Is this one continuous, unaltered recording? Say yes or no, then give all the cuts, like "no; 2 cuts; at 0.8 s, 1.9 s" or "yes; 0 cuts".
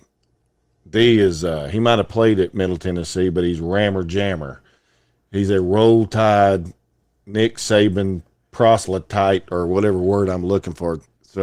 yes; 0 cuts